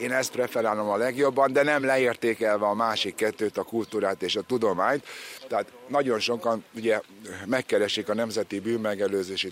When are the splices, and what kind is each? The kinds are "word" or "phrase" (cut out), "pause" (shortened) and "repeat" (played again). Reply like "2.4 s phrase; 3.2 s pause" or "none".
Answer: none

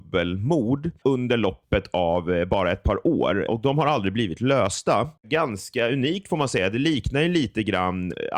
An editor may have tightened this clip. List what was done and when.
1.0 s pause; 5.2 s pause

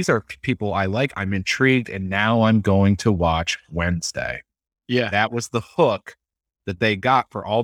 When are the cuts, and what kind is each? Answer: none

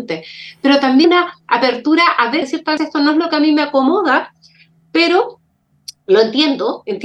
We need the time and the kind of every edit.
1.0 s word; 2.4 s phrase; 2.8 s word

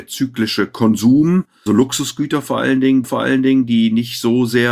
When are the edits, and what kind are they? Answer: 1.7 s word; 3.0 s repeat

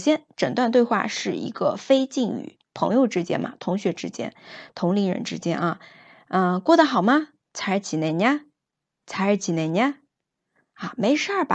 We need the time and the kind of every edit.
none

